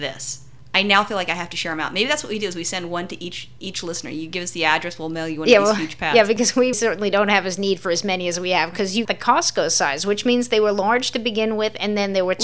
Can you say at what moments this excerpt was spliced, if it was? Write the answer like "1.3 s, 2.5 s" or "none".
6.7 s, 9.0 s

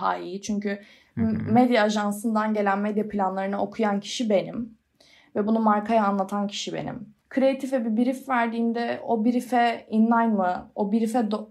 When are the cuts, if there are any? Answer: 7.2 s

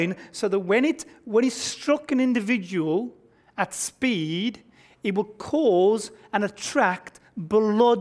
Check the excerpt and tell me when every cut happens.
none

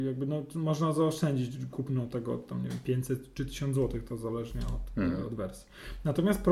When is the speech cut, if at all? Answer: none

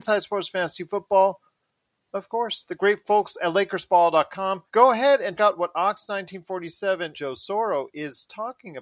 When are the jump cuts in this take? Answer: 4.7 s, 5.4 s, 7.1 s

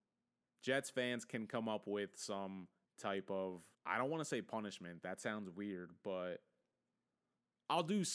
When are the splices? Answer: 2.8 s, 3.7 s

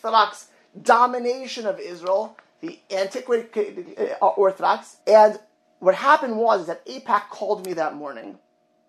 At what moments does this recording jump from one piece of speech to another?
5.0 s

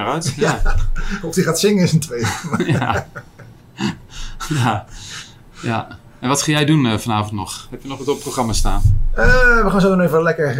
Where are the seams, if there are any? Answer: none

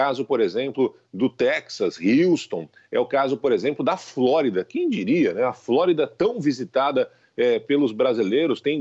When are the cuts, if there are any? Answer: none

